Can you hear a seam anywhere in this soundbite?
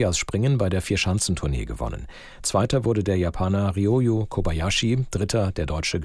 no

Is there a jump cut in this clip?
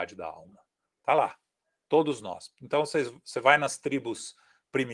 no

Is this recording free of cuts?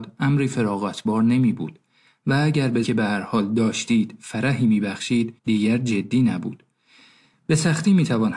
no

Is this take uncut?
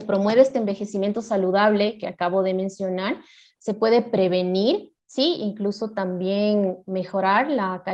no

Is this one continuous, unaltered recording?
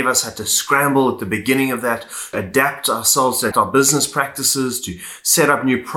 no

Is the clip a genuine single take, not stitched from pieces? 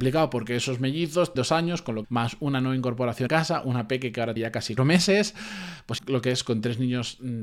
no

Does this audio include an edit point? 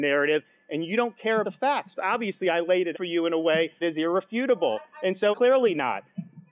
yes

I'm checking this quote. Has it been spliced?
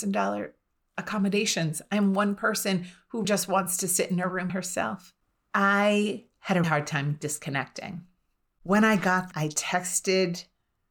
yes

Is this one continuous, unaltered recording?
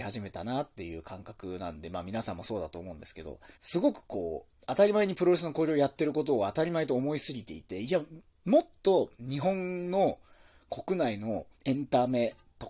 no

